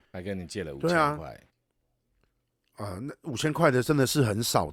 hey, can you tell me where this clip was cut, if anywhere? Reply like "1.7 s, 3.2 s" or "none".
none